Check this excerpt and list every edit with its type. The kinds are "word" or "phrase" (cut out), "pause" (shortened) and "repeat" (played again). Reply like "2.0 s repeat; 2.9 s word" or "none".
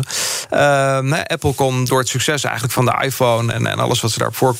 none